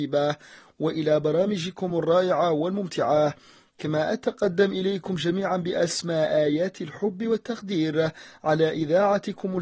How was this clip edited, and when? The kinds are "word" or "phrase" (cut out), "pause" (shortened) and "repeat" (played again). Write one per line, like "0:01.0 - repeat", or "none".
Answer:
none